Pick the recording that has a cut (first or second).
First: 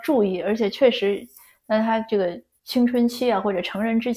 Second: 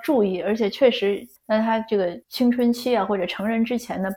second